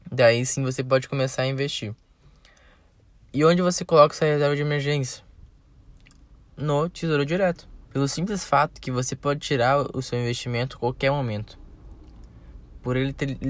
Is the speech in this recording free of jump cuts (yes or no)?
no